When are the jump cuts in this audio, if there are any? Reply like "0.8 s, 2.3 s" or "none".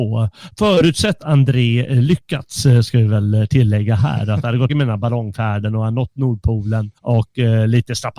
1.2 s, 4.7 s, 7.0 s